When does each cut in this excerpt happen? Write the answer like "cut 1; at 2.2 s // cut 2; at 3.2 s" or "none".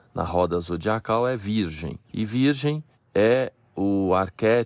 cut 1; at 2.0 s // cut 2; at 2.9 s

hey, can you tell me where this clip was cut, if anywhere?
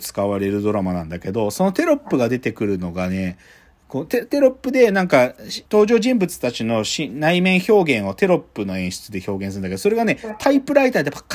cut 1; at 5.7 s

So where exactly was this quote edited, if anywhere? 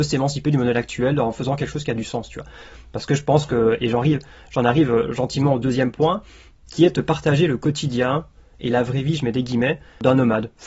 none

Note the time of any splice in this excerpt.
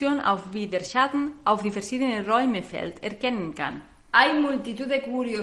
none

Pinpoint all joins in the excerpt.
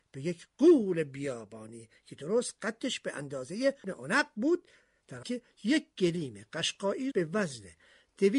cut 1; at 3.8 s // cut 2; at 5.2 s // cut 3; at 7.1 s

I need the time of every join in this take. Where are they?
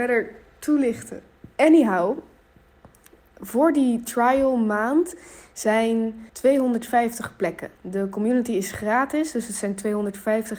cut 1; at 1.5 s // cut 2; at 6.3 s // cut 3; at 7.8 s

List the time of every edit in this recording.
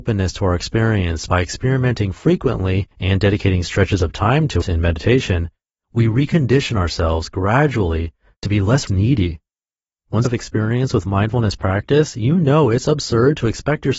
cut 1; at 1.3 s // cut 2; at 2.9 s // cut 3; at 4.6 s // cut 4; at 8.9 s // cut 5; at 10.2 s

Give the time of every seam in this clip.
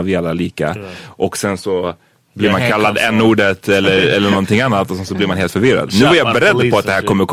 none

